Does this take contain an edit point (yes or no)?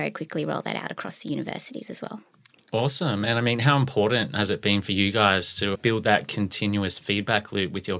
no